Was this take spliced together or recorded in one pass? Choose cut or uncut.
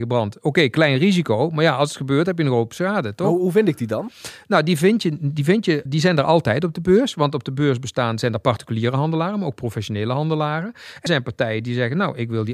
cut